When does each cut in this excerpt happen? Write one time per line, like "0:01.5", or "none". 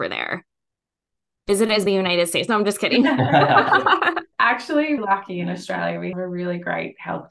0:01.9
0:04.3
0:05.0
0:06.1